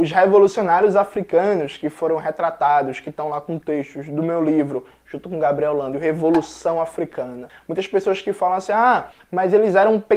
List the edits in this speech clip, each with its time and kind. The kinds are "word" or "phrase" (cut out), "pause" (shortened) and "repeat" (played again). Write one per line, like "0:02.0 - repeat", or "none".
none

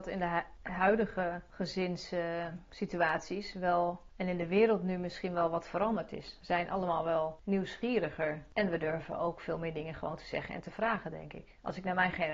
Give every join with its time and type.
none

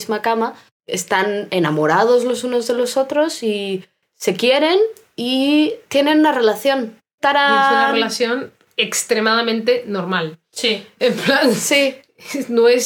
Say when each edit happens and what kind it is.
none

